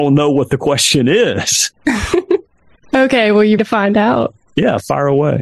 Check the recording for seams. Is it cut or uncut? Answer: cut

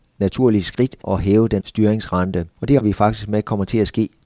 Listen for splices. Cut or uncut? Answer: cut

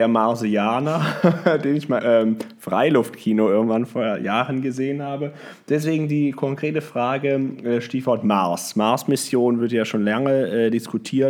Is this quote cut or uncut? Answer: cut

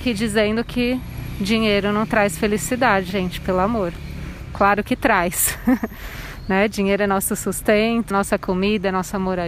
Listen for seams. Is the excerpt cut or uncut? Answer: cut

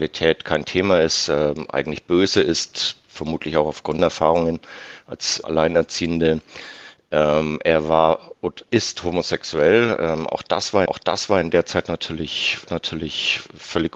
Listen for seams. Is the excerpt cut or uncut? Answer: cut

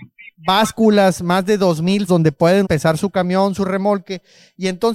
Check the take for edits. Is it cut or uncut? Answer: cut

